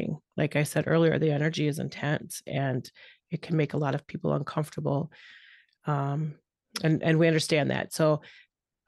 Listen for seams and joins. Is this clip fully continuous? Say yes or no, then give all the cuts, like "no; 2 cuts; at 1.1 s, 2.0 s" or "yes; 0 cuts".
yes; 0 cuts